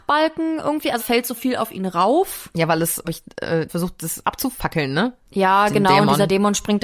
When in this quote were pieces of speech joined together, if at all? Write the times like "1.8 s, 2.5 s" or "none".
1.0 s, 1.4 s, 3.0 s, 3.7 s, 5.2 s